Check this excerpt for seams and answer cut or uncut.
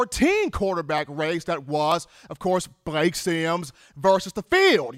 uncut